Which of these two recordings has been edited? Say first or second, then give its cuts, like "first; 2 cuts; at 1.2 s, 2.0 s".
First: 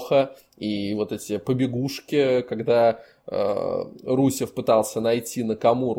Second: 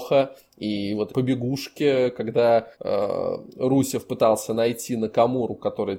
second; 2 cuts; at 1.1 s, 2.7 s